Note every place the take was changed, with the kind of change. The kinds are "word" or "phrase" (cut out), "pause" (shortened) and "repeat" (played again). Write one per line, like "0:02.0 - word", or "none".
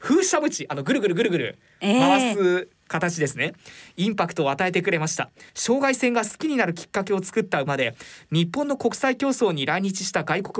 0:05.5 - pause